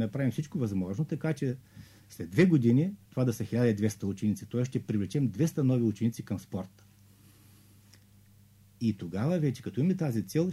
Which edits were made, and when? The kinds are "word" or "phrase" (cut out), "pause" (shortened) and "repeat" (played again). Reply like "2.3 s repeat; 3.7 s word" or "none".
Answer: 3.1 s pause